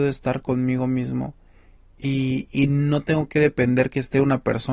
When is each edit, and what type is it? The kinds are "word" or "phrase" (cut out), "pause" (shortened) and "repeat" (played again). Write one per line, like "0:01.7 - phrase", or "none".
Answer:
none